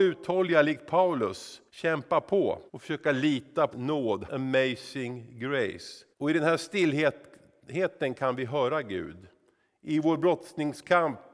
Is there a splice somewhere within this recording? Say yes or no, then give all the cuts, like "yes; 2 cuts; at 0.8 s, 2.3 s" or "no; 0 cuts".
yes; 5 cuts; at 1.7 s, 2.7 s, 3.7 s, 4.3 s, 6.1 s